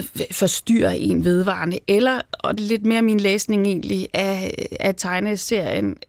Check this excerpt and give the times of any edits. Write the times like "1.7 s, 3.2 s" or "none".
2.6 s, 4.1 s